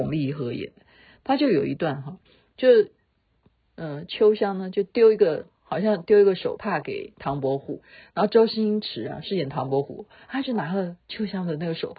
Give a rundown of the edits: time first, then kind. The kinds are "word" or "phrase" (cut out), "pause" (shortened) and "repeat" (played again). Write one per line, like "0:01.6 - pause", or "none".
none